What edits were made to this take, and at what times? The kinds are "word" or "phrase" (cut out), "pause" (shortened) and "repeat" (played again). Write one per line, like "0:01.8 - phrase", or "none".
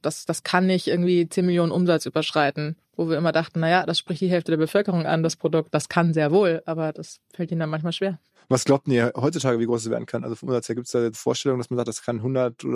0:05.7 - word
0:08.3 - pause
0:11.1 - word